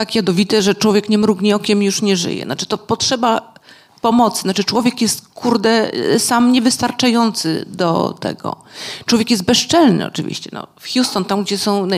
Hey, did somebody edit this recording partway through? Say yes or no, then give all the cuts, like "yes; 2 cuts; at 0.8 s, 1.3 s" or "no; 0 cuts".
no; 0 cuts